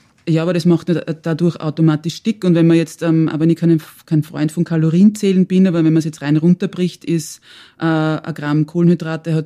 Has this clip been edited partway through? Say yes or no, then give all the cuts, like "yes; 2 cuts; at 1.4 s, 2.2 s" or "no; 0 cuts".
no; 0 cuts